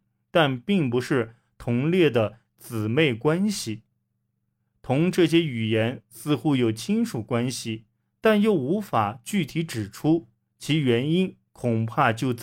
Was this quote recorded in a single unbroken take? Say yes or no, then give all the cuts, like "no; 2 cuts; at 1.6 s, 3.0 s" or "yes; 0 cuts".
yes; 0 cuts